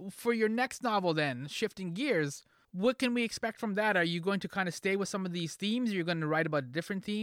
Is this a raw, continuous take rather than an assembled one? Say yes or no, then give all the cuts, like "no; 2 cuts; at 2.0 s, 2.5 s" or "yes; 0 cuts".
no; 1 cut; at 2.6 s